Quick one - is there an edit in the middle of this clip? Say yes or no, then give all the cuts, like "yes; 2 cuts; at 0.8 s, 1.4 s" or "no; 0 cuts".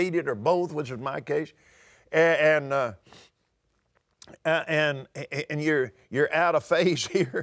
no; 0 cuts